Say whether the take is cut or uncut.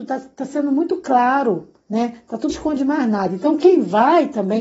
cut